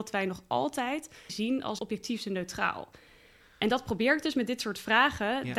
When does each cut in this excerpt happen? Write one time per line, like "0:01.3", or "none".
0:01.3
0:01.8

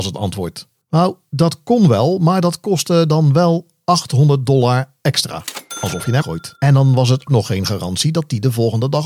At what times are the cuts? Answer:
0:06.2
0:06.6
0:07.3

